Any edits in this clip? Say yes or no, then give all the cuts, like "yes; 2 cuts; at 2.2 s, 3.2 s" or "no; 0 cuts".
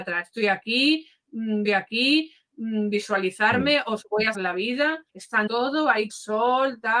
yes; 5 cuts; at 1.6 s, 4.3 s, 5.1 s, 5.5 s, 6.1 s